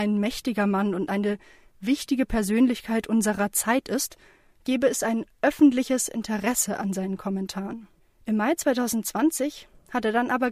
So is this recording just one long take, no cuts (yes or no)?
yes